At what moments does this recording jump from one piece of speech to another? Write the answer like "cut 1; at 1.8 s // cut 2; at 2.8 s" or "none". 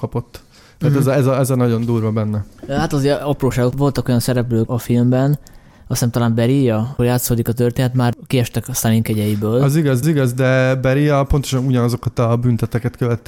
cut 1; at 3.7 s // cut 2; at 4.7 s // cut 3; at 5.7 s // cut 4; at 7.0 s // cut 5; at 10.0 s